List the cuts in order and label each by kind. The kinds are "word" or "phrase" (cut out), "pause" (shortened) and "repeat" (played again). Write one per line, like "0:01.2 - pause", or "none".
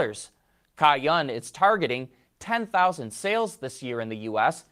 none